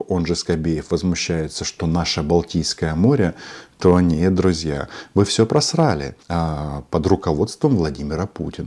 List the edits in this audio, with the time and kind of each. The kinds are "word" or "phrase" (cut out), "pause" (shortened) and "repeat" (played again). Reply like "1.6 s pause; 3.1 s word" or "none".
6.2 s pause